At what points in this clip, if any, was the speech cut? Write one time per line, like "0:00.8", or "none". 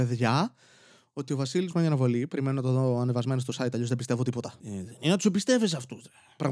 0:01.7